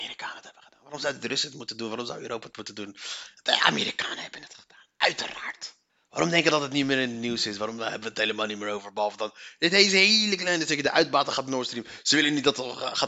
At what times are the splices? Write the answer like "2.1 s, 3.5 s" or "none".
5.9 s